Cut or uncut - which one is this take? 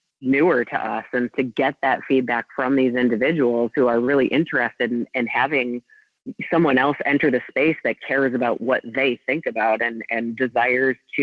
cut